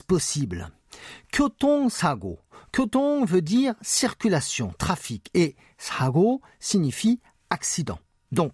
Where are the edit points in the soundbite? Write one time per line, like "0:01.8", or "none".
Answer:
none